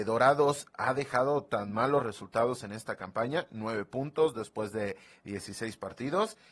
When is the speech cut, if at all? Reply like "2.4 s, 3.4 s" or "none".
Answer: none